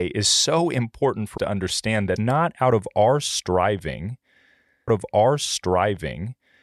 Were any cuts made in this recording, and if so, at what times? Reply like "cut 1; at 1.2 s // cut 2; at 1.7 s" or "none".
cut 1; at 1.4 s // cut 2; at 2.2 s // cut 3; at 4.9 s